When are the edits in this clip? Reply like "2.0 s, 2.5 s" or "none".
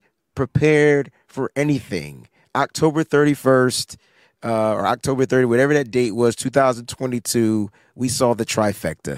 none

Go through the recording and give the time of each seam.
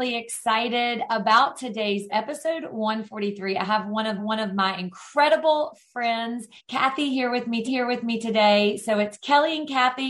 2.1 s, 4.2 s, 6.6 s, 7.7 s

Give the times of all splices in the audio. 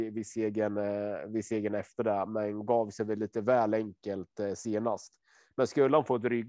none

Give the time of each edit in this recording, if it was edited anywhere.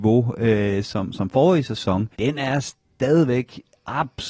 2.1 s

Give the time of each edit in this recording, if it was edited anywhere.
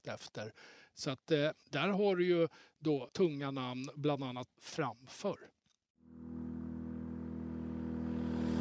3.1 s, 4.5 s

